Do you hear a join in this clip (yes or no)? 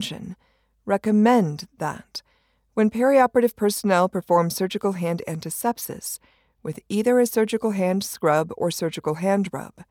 no